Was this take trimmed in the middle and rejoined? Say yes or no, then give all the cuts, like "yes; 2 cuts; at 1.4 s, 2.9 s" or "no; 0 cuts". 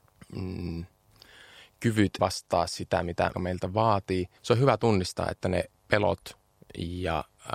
yes; 4 cuts; at 2.2 s, 3.3 s, 4.4 s, 5.8 s